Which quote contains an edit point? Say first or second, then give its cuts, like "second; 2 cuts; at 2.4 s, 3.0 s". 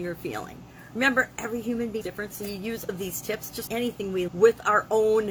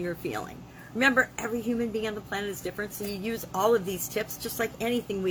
first; 4 cuts; at 2.0 s, 2.9 s, 3.7 s, 4.3 s